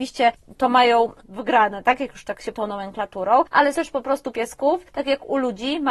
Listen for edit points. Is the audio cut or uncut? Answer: cut